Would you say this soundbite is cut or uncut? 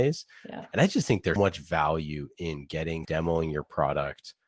cut